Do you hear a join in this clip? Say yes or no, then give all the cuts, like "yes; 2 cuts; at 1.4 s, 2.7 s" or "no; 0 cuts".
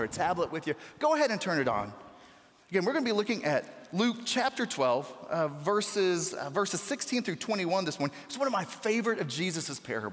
no; 0 cuts